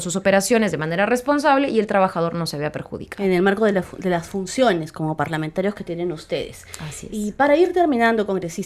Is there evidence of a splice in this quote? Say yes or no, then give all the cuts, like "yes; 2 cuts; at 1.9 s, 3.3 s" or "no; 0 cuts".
no; 0 cuts